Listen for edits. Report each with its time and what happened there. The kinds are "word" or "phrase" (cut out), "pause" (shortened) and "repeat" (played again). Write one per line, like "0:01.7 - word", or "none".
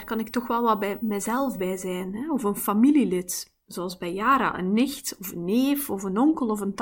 none